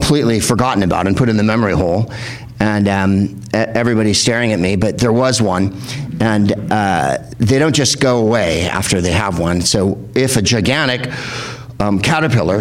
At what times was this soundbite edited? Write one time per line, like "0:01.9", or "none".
none